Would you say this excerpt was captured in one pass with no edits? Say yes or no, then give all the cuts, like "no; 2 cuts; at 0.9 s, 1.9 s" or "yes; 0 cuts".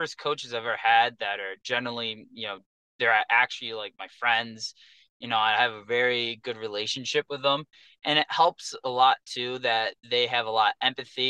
yes; 0 cuts